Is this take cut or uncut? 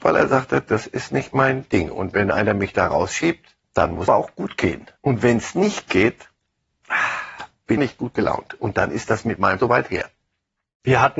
cut